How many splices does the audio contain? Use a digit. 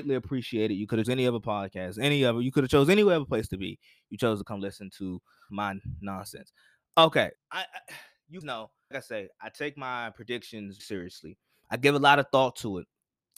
6